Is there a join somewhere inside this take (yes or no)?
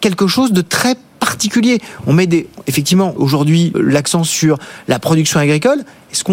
yes